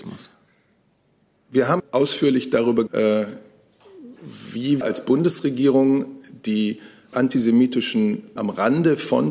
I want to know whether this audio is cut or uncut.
cut